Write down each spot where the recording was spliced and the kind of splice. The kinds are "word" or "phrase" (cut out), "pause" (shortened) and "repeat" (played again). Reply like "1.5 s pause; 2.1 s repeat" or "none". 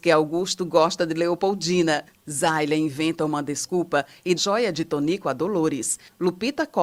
4.4 s phrase